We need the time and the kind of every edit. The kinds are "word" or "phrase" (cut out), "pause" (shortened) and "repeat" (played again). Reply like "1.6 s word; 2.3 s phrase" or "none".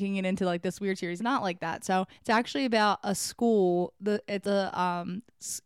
1.2 s phrase; 2.2 s pause; 4.4 s word